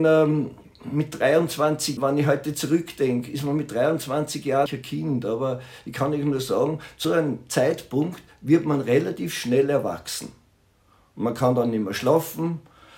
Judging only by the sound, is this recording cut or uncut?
cut